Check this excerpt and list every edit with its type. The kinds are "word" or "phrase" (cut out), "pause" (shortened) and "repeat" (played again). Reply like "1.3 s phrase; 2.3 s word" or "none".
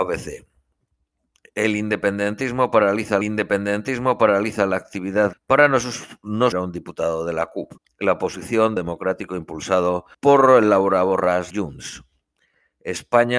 3.2 s repeat; 5.3 s phrase; 6.5 s word; 7.8 s pause; 8.8 s phrase; 10.1 s pause; 11.5 s word